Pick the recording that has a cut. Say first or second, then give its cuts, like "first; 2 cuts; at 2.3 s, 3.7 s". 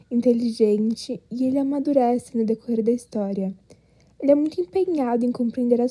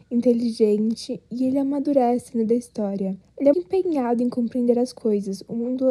second; 3 cuts; at 2.5 s, 3.2 s, 3.5 s